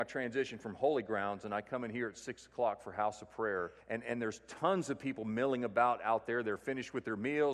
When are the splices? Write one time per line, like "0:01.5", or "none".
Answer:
0:03.8